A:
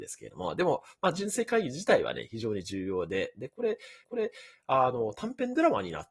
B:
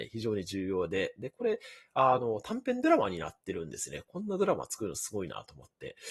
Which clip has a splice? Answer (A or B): A